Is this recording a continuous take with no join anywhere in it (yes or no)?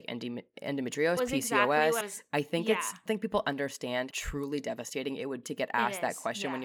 no